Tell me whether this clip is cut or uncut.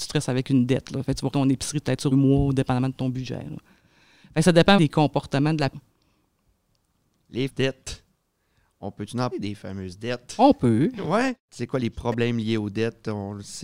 cut